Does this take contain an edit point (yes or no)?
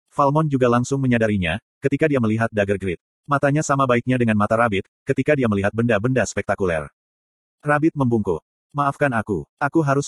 no